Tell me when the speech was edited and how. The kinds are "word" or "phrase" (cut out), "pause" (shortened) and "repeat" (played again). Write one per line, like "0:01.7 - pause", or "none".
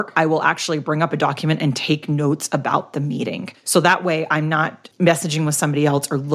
0:03.6 - pause
0:04.9 - word